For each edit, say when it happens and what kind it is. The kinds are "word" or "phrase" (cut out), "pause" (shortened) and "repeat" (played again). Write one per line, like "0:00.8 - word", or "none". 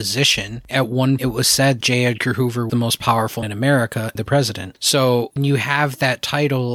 0:01.2 - word
0:01.8 - word
0:02.7 - word
0:03.4 - word
0:04.1 - word
0:05.4 - word

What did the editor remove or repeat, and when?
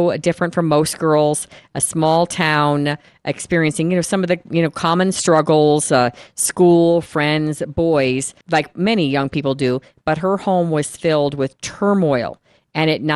0:08.4 - pause

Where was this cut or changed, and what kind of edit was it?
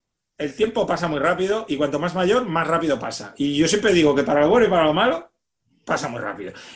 none

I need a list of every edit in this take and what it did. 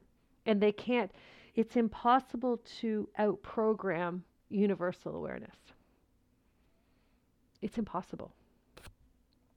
0:01.5 - word

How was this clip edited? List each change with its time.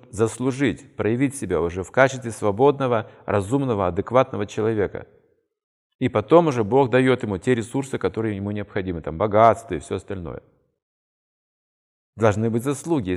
none

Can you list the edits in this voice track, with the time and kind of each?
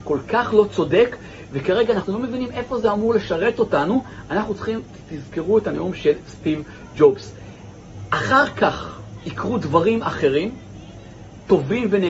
none

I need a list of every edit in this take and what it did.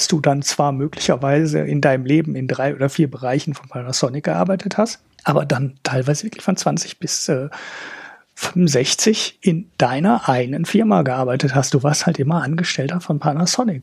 none

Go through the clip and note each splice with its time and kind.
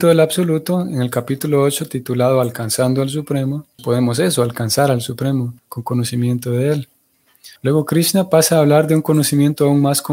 0:03.8 - word
0:05.6 - pause
0:07.6 - pause

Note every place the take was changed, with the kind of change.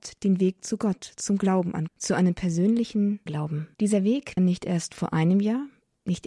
0:01.9 - word
0:03.3 - phrase
0:03.7 - pause
0:04.4 - word

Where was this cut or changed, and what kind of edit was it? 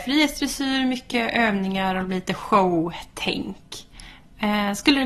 none

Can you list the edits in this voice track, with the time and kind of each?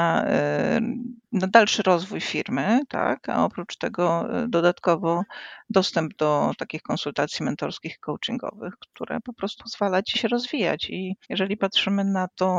0:01.2 - pause
0:09.6 - word
0:10.1 - phrase
0:11.2 - pause

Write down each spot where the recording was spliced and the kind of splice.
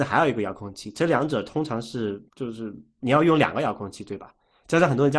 0:02.3 - pause

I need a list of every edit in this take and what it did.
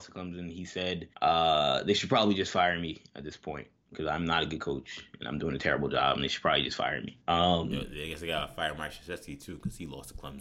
0:01.1 - pause
0:07.2 - pause

